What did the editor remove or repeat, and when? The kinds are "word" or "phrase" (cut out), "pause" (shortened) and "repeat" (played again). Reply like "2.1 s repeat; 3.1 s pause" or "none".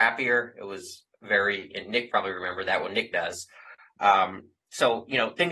2.1 s phrase; 3.1 s word